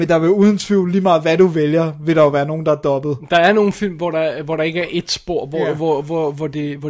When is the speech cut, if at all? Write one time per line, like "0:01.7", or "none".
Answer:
none